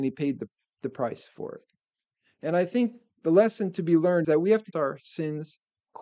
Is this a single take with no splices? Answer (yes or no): no